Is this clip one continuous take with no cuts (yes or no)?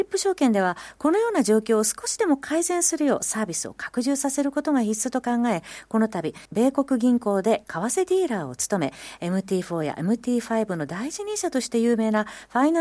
no